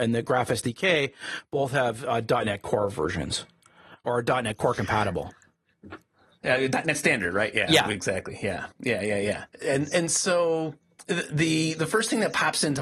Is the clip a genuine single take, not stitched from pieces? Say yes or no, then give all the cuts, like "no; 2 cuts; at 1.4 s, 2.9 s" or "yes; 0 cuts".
no; 1 cut; at 8.7 s